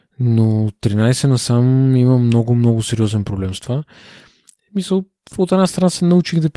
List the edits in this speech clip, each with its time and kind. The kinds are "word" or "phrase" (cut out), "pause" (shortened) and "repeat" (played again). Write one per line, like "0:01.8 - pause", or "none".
none